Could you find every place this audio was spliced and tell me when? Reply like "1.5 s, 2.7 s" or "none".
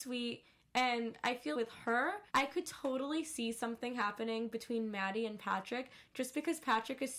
1.5 s, 2.3 s